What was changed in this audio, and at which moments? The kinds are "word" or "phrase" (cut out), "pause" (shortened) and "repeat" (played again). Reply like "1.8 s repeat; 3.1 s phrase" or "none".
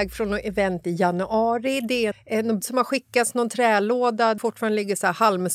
2.1 s word; 2.6 s word; 4.4 s word